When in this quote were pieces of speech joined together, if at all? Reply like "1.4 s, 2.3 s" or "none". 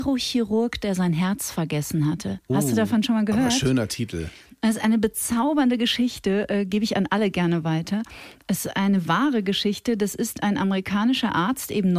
none